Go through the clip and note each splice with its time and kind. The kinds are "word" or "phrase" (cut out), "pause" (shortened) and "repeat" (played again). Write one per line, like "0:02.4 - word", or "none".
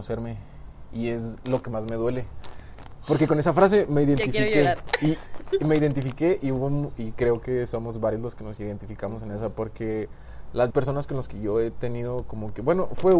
0:10.7 - word